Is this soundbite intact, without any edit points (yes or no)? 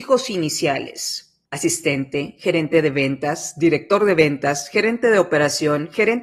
no